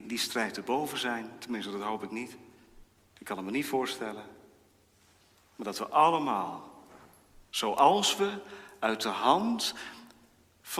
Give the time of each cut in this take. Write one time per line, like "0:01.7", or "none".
none